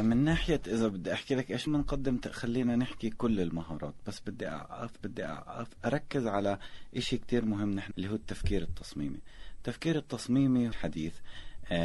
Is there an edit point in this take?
yes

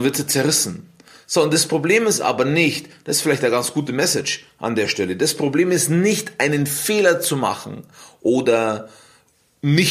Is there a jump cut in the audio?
no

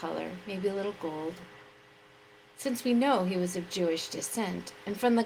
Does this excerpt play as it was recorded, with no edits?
yes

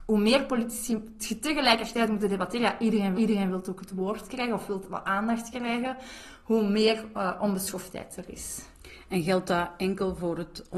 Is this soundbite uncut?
no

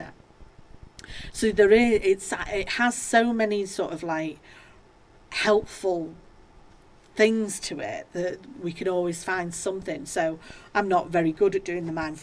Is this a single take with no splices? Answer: yes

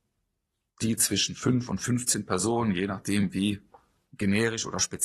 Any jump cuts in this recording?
no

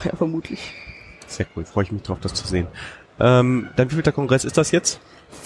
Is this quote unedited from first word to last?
yes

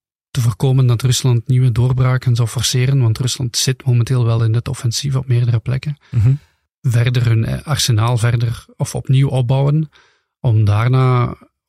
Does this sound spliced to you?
no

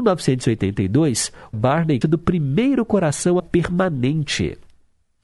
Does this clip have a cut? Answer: yes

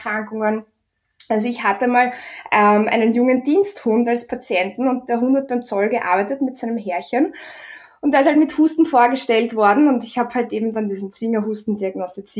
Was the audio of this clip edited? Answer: no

